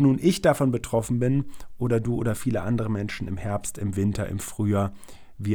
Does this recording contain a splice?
no; 0 cuts

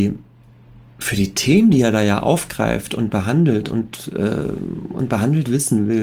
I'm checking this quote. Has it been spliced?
no; 0 cuts

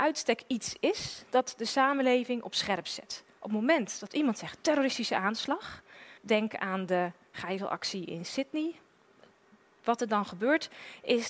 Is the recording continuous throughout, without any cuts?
no; 1 cut; at 6.2 s

